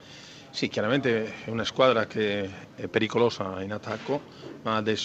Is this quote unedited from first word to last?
yes; 0 cuts

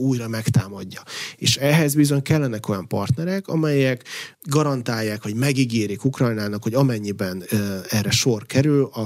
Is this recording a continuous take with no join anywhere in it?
no; 1 cut; at 4.3 s

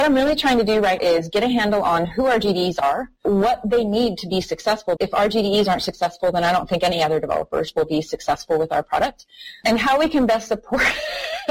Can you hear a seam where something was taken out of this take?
yes; 2 cuts; at 1.0 s, 5.0 s

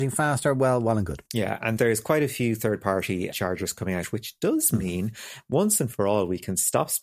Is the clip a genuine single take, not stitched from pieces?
no; 3 cuts; at 1.3 s, 1.8 s, 3.3 s

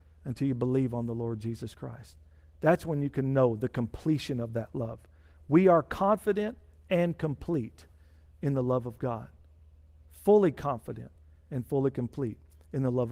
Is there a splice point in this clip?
no; 0 cuts

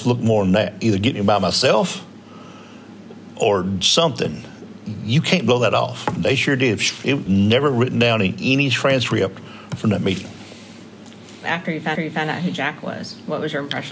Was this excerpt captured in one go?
no; 2 cuts; at 7.3 s, 11.9 s

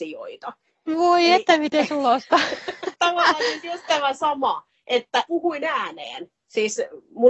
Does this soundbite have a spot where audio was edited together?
no; 0 cuts

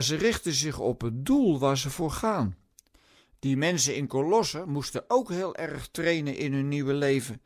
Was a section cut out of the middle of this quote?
no; 0 cuts

